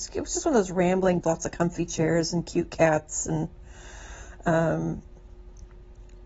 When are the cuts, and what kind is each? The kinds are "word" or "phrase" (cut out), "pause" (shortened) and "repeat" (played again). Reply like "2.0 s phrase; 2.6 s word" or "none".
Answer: 1.2 s phrase